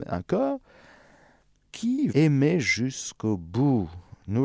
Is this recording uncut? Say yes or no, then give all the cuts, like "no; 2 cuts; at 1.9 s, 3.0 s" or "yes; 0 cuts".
no; 2 cuts; at 1.6 s, 2.1 s